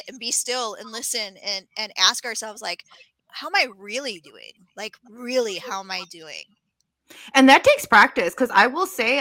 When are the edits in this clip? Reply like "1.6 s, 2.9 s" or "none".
3.2 s